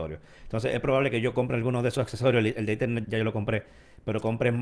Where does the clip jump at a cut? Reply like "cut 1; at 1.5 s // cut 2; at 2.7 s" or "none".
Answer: cut 1; at 3.0 s